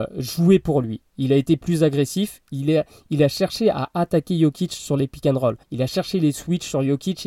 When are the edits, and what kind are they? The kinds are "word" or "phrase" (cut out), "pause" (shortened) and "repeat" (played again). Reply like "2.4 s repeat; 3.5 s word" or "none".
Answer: 5.6 s pause